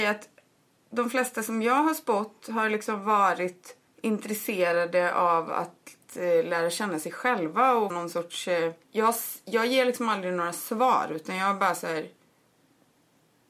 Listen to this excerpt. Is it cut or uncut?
cut